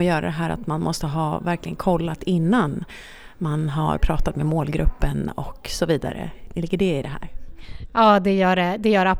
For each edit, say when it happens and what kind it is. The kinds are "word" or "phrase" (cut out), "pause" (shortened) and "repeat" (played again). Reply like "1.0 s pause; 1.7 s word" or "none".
none